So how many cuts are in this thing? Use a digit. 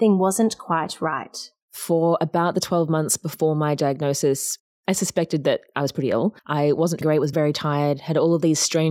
4